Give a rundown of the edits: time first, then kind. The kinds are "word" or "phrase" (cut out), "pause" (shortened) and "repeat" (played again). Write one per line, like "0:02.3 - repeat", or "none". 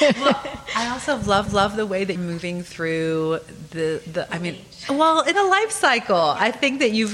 0:01.5 - repeat
0:02.2 - word
0:05.3 - word